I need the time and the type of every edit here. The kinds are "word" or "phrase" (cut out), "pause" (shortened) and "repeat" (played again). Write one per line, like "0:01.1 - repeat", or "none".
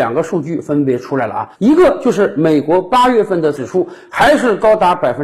0:01.5 - pause
0:03.5 - word